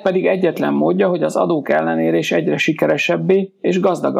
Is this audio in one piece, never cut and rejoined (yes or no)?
yes